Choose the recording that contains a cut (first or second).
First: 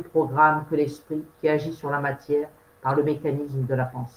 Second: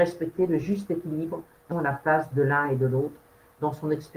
second